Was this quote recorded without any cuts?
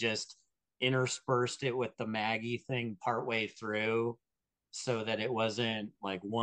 yes; 0 cuts

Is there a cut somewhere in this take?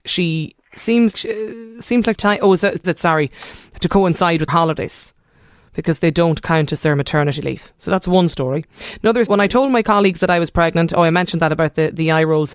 yes; 5 cuts; at 1.1 s, 2.1 s, 2.8 s, 4.5 s, 9.3 s

